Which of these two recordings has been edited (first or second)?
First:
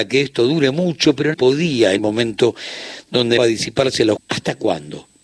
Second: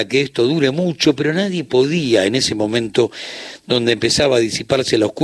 first